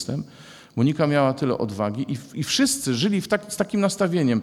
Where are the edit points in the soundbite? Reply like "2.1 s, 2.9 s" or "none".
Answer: none